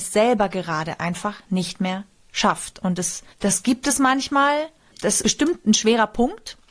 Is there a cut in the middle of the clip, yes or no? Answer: yes